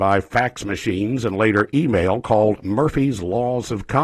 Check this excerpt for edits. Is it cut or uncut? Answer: uncut